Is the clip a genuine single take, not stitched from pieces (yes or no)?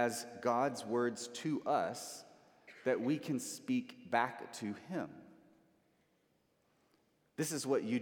yes